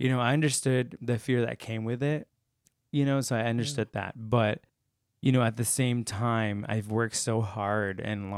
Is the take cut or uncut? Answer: uncut